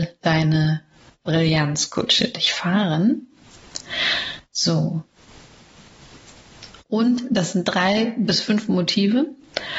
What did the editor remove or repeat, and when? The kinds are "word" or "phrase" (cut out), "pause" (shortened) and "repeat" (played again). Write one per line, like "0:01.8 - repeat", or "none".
0:06.8 - pause

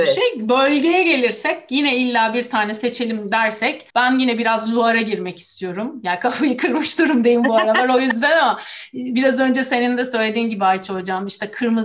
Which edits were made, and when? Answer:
0:03.9 - pause

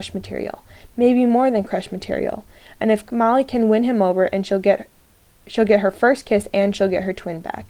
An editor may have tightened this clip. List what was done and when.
none

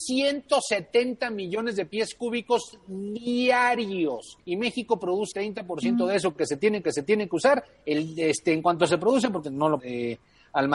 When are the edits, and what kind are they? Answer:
0:04.4 - pause
0:05.3 - word
0:06.8 - repeat
0:09.4 - word
0:09.8 - word

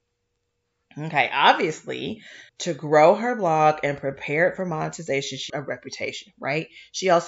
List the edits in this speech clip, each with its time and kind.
0:02.5 - pause
0:05.5 - phrase

